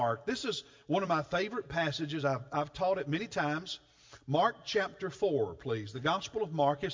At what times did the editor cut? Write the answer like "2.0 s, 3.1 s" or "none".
none